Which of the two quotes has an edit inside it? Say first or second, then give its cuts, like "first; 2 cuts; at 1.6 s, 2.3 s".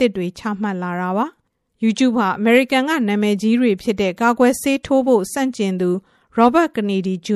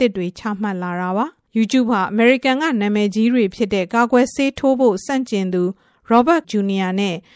second; 2 cuts; at 1.5 s, 6.4 s